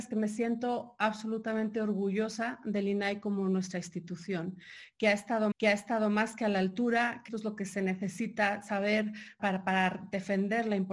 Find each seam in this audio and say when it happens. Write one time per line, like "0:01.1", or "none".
0:05.5
0:07.3
0:09.4